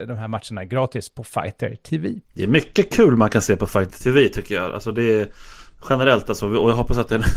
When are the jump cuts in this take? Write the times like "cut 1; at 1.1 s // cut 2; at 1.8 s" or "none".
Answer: cut 1; at 2.2 s